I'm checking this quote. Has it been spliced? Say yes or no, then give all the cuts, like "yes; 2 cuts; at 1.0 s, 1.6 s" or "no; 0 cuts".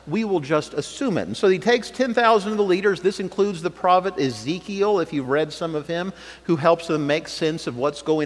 no; 0 cuts